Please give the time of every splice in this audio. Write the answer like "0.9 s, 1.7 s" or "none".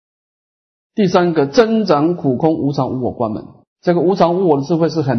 3.7 s